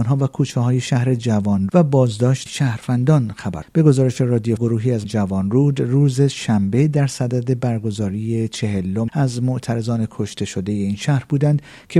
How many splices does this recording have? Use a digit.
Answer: 6